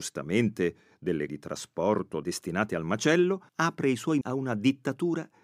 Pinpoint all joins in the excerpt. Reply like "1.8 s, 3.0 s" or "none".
1.3 s, 2.2 s, 3.5 s, 4.2 s